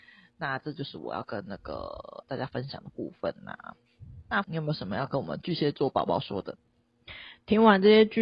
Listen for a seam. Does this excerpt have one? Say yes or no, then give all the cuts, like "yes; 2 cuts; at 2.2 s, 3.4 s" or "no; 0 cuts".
yes; 1 cut; at 4.4 s